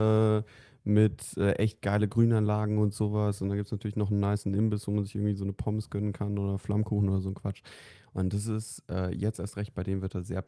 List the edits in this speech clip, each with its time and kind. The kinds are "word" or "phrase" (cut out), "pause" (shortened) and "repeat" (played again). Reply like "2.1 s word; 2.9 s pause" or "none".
none